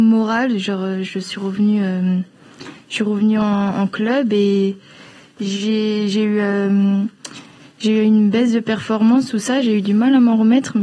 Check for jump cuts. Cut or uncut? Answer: uncut